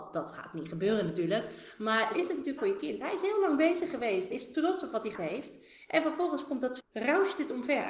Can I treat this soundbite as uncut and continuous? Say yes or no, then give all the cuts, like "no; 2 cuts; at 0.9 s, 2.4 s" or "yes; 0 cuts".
no; 5 cuts; at 2.1 s, 2.6 s, 4.3 s, 5.1 s, 6.8 s